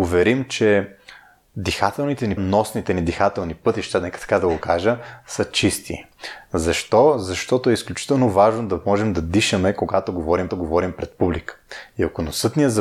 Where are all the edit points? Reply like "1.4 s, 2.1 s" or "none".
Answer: 2.4 s, 10.5 s